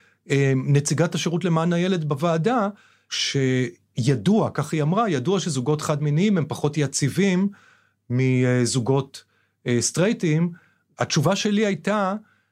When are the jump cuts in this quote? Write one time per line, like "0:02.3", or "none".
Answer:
none